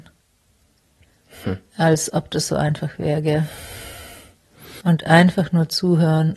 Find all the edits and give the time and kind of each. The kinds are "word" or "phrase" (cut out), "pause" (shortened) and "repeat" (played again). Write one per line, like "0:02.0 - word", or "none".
0:04.8 - pause